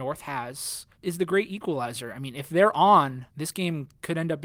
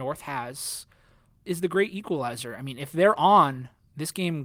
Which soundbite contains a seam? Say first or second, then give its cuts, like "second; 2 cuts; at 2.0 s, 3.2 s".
first; 2 cuts; at 0.9 s, 3.3 s